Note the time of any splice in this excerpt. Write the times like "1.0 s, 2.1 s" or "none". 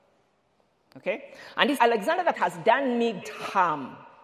1.8 s, 2.3 s, 3.2 s

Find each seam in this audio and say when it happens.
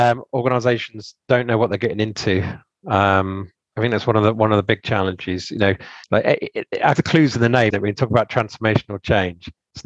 3.6 s, 6.0 s, 7.0 s, 7.7 s

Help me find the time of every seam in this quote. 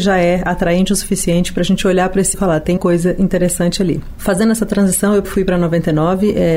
2.3 s, 2.8 s, 5.2 s

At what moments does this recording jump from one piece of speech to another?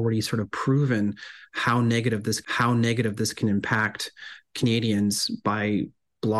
2.4 s

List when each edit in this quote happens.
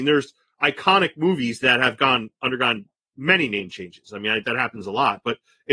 4.4 s

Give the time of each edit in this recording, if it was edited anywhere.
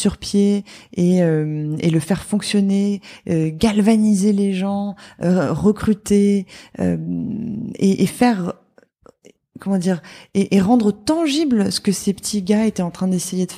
none

